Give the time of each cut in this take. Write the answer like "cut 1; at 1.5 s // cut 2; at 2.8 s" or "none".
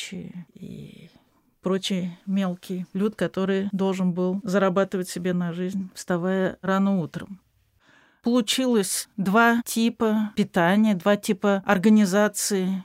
none

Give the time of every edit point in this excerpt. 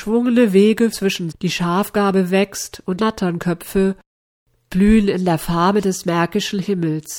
cut 1; at 0.9 s // cut 2; at 1.3 s // cut 3; at 3.0 s

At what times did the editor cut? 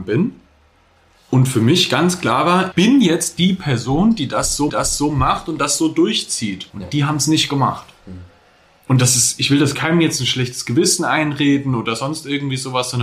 cut 1; at 2.7 s // cut 2; at 4.7 s // cut 3; at 6.7 s // cut 4; at 9.7 s

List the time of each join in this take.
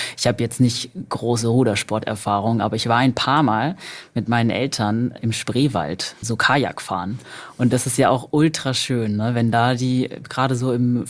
cut 1; at 6.2 s

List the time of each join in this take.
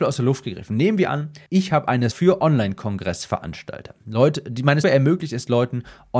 cut 1; at 1.5 s // cut 2; at 2.1 s // cut 3; at 4.8 s

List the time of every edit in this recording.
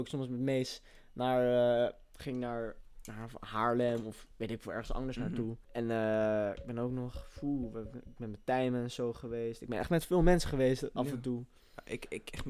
cut 1; at 5.6 s

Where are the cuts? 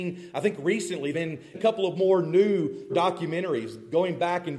cut 1; at 1.1 s // cut 2; at 1.5 s // cut 3; at 2.9 s

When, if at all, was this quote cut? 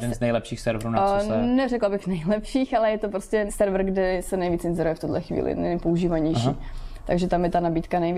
cut 1; at 3.5 s

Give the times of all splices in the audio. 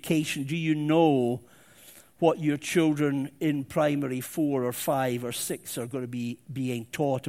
none

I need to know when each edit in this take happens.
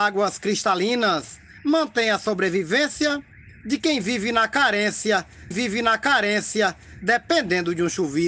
cut 1; at 5.5 s

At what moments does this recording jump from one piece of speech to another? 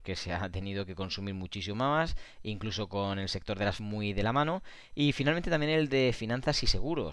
cut 1; at 3.8 s

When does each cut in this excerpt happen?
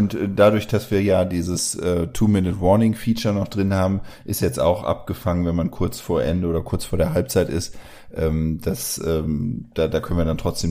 none

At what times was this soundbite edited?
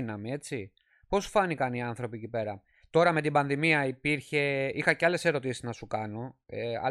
none

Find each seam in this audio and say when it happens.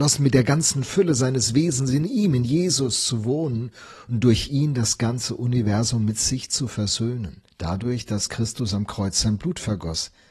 cut 1; at 7.5 s

